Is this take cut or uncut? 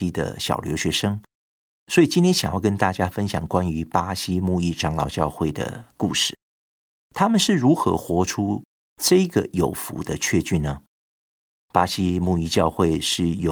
uncut